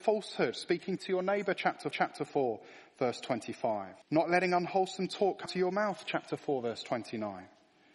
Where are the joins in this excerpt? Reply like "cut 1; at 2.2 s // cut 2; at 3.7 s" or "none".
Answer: cut 1; at 1.0 s // cut 2; at 1.9 s // cut 3; at 4.0 s // cut 4; at 5.5 s